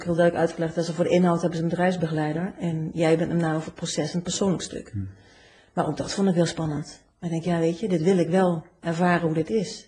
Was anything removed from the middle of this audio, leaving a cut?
no; 0 cuts

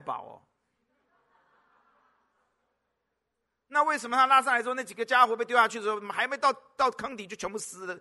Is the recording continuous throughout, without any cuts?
yes; 0 cuts

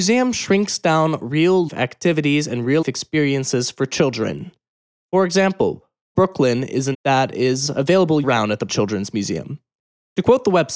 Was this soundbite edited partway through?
yes; 6 cuts; at 1.7 s, 2.8 s, 6.2 s, 6.9 s, 8.2 s, 8.7 s

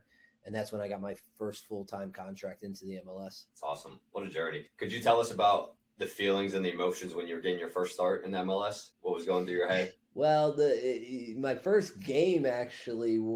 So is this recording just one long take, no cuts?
no; 5 cuts; at 3.5 s, 4.7 s, 5.8 s, 8.9 s, 10.0 s

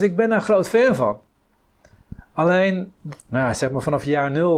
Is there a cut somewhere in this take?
yes; 1 cut; at 3.2 s

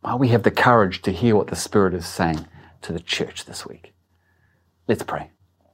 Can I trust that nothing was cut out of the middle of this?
yes; 0 cuts

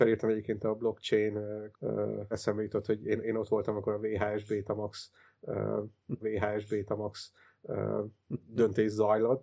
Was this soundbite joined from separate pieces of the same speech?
yes; 3 cuts; at 1.7 s, 2.3 s, 6.2 s

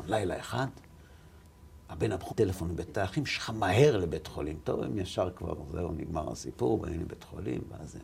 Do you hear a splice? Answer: yes; 2 cuts; at 2.3 s, 2.9 s

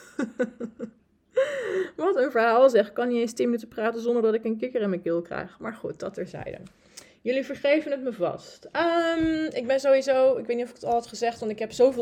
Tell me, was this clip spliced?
no; 0 cuts

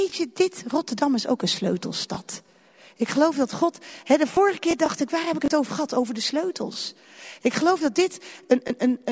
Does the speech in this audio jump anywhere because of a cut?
no; 0 cuts

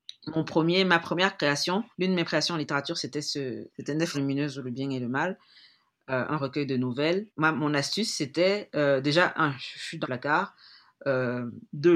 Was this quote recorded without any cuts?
no; 5 cuts; at 1.9 s, 2.3 s, 4.1 s, 7.3 s, 10.0 s

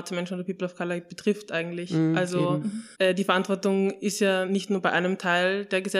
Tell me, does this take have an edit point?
yes; 1 cut; at 2.9 s

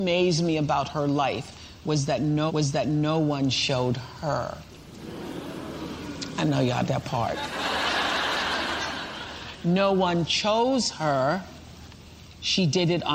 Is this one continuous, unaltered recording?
no; 2 cuts; at 2.5 s, 6.8 s

